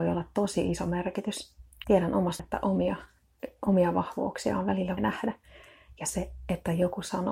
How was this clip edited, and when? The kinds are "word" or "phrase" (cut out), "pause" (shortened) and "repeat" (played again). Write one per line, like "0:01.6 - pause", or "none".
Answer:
0:01.8 - word
0:02.4 - word
0:05.0 - word